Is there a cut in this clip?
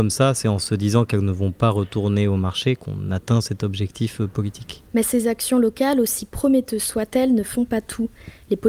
no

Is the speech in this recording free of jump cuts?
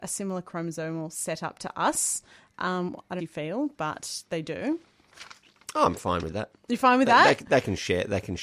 no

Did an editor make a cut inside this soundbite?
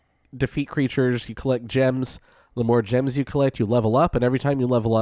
no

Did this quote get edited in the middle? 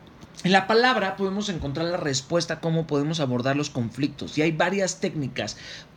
no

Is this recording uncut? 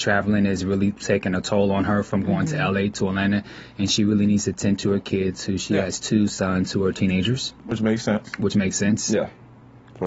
yes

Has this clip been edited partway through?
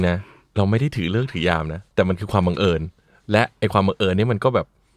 no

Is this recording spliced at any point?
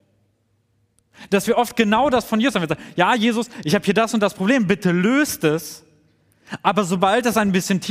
no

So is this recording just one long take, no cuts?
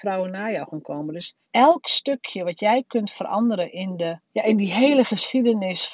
no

